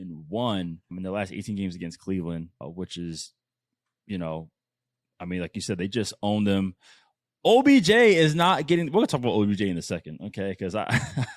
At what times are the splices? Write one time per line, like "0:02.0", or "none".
0:00.9
0:02.6